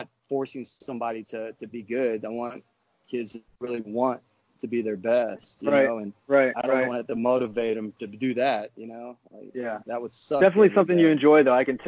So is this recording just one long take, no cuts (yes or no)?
yes